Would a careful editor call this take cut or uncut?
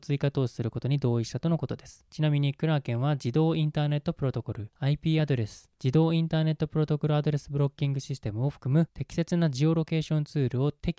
uncut